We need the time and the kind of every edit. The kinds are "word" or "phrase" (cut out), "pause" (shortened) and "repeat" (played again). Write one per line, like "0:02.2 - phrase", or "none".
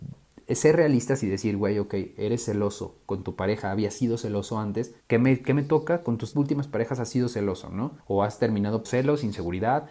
0:05.0 - pause
0:06.3 - word
0:08.0 - pause
0:08.8 - word